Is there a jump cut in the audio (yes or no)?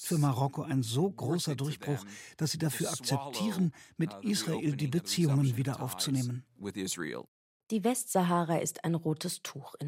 no